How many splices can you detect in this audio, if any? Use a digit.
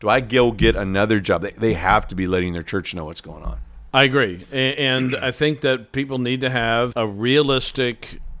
1